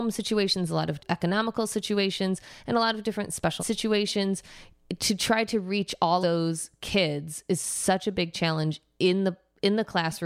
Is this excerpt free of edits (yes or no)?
no